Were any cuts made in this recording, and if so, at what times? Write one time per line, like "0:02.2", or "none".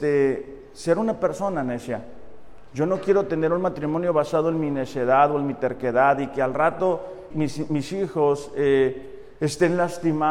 0:07.3